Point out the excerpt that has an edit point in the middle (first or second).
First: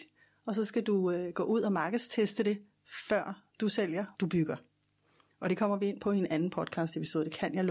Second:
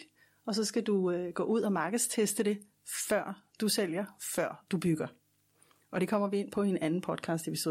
first